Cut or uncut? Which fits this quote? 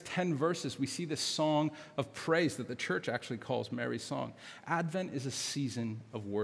uncut